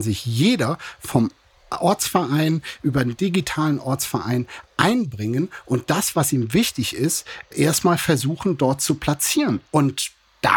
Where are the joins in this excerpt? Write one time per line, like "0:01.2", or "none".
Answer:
none